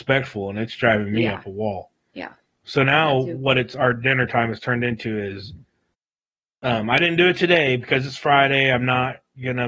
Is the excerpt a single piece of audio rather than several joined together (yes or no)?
yes